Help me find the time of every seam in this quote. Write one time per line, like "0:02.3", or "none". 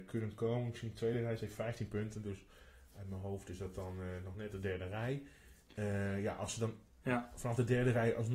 none